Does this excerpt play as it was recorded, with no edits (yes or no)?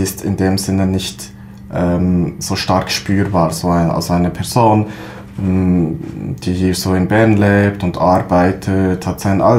yes